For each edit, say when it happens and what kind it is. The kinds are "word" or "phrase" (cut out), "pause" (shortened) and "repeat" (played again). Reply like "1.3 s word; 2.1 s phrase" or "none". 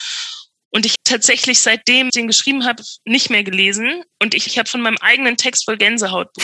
0.9 s phrase; 2.1 s word; 4.5 s phrase